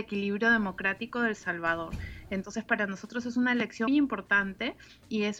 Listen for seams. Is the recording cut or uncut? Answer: cut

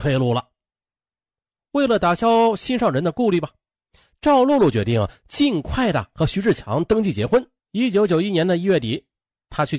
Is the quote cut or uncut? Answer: cut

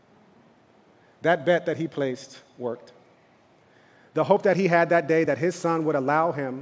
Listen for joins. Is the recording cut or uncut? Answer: uncut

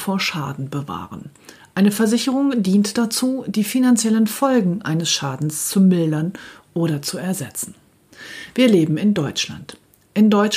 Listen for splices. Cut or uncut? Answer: uncut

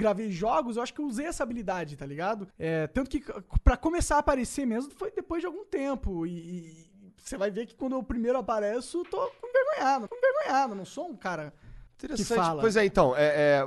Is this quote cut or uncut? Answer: cut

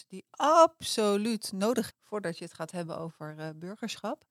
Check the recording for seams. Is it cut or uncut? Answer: cut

